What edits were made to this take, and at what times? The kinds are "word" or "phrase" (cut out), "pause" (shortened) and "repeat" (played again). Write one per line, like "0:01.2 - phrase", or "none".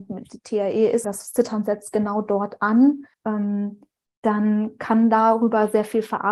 0:01.0 - word
0:03.1 - pause